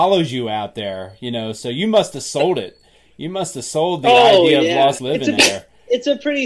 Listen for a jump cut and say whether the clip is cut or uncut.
cut